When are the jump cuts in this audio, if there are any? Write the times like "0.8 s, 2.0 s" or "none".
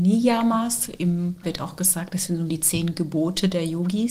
1.4 s, 2.5 s